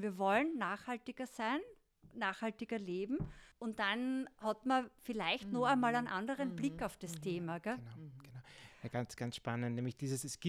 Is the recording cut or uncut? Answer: cut